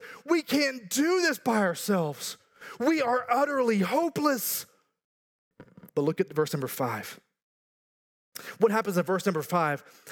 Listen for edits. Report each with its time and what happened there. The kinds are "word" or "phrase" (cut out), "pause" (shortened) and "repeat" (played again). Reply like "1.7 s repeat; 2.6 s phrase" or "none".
5.9 s pause